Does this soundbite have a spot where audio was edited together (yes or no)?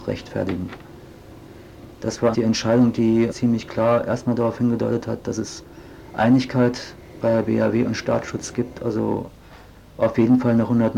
yes